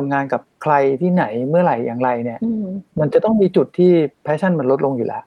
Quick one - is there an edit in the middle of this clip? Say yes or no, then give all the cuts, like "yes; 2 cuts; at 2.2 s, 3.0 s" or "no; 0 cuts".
yes; 1 cut; at 4.1 s